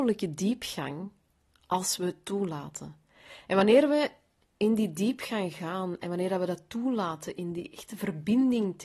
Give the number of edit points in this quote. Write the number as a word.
zero